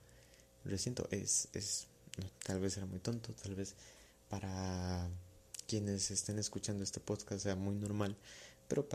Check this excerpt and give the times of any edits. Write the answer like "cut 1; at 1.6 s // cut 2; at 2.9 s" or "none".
cut 1; at 2.3 s